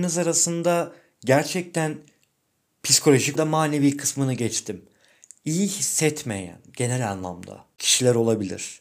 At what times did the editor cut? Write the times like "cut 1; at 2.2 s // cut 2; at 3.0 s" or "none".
cut 1; at 3.4 s